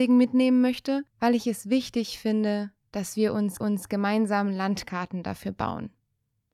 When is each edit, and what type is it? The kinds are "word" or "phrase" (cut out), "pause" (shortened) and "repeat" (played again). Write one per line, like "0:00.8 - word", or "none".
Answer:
0:01.1 - pause
0:03.6 - repeat